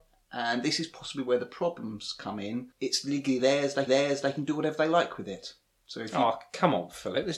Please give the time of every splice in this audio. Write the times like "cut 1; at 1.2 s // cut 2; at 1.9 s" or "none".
cut 1; at 2.7 s // cut 2; at 3.9 s